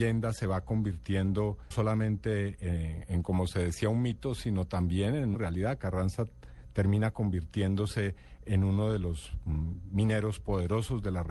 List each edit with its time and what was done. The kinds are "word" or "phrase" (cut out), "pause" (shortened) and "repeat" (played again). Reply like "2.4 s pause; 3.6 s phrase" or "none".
1.7 s word; 5.3 s word